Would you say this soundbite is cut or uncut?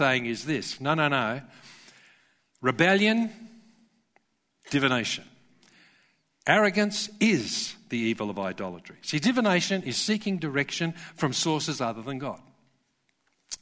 uncut